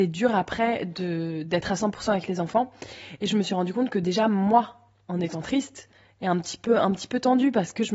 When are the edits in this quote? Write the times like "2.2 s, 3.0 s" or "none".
none